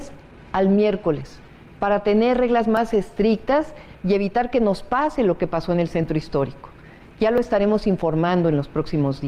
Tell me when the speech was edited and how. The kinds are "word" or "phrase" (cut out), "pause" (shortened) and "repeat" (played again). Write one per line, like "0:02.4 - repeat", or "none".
none